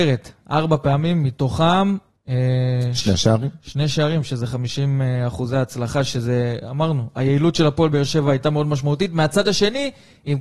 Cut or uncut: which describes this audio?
uncut